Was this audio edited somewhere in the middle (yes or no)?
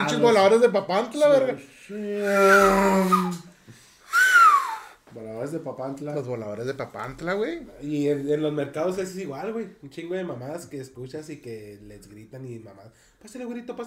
no